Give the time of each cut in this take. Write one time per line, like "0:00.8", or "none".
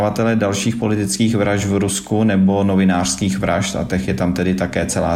none